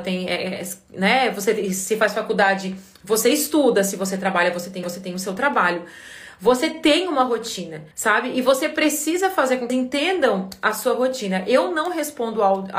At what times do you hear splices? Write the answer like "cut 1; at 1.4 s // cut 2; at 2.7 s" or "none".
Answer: cut 1; at 4.8 s // cut 2; at 7.9 s // cut 3; at 9.7 s